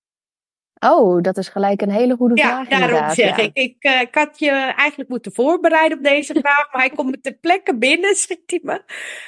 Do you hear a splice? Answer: no; 0 cuts

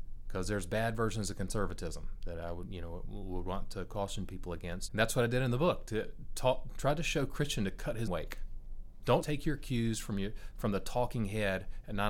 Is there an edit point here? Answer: yes; 3 cuts; at 4.9 s, 8.1 s, 9.2 s

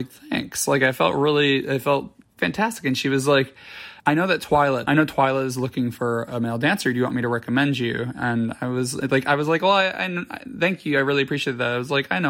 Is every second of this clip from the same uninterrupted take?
no; 3 cuts; at 2.2 s, 4.0 s, 4.9 s

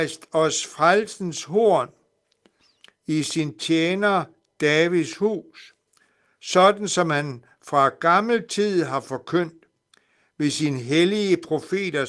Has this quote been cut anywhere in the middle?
no; 0 cuts

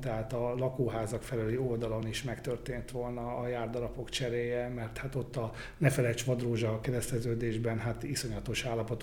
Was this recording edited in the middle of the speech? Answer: no; 0 cuts

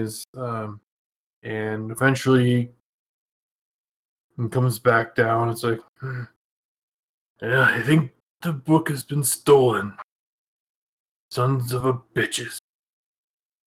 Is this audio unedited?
yes; 0 cuts

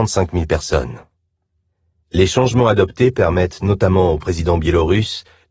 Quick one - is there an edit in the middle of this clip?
no; 0 cuts

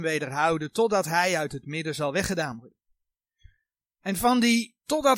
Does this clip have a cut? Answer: no; 0 cuts

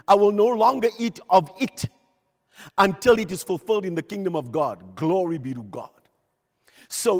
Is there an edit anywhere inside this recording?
no; 0 cuts

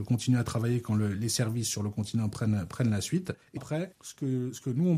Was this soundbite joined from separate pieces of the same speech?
yes; 1 cut; at 3.6 s

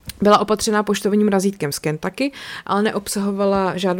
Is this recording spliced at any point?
no; 0 cuts

